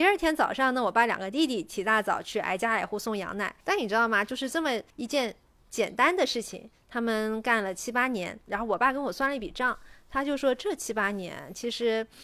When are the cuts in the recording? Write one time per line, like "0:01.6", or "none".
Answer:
0:03.6
0:04.9